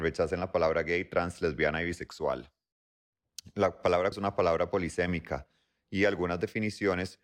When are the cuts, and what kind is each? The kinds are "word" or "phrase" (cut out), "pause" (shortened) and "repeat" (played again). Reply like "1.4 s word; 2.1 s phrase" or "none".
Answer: 4.1 s word

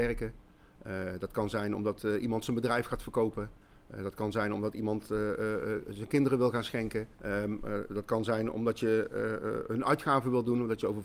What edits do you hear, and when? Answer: 7.1 s pause

